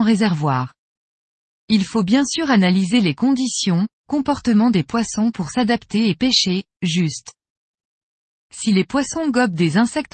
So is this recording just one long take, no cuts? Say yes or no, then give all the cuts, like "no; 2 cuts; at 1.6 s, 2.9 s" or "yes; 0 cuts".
yes; 0 cuts